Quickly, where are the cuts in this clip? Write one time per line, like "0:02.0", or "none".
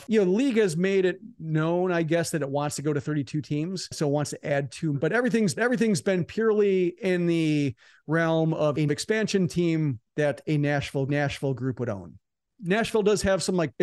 0:04.9
0:05.6
0:11.1